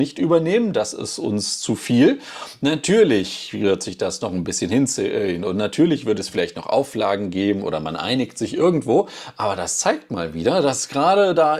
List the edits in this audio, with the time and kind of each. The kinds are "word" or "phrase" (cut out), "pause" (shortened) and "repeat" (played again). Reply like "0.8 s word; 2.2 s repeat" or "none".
none